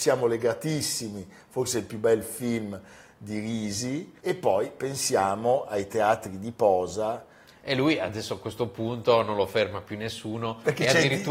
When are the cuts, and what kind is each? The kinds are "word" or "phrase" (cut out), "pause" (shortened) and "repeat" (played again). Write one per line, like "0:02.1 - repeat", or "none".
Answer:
none

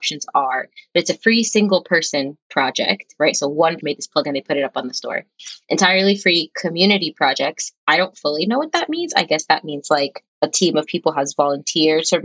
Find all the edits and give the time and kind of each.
0:03.8 - word
0:10.3 - pause

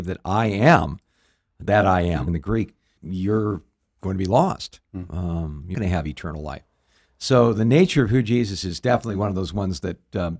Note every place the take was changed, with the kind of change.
0:02.3 - word
0:03.0 - word
0:05.7 - word
0:08.6 - word

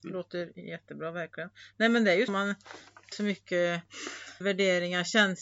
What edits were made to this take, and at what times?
0:02.3 - word
0:03.1 - word
0:04.4 - word

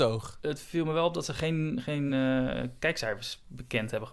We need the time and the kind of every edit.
none

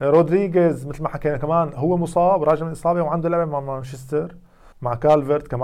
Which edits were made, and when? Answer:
0:04.7 - pause

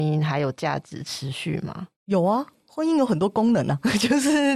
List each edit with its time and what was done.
0:02.0 - pause

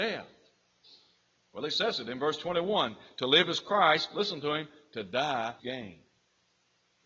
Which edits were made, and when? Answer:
0:05.6 - word

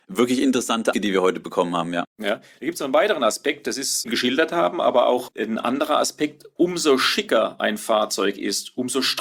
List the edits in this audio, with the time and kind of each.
0:00.9 - word
0:04.0 - phrase

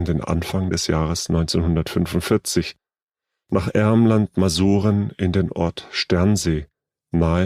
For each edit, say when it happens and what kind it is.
none

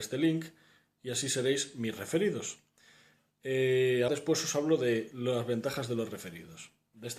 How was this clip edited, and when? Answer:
0:04.1 - word

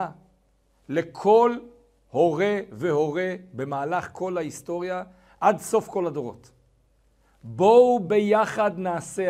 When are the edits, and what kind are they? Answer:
none

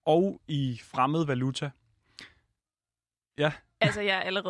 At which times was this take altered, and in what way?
none

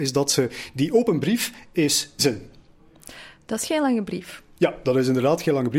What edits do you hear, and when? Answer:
0:02.2 - word

